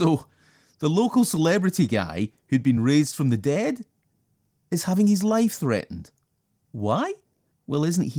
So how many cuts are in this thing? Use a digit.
0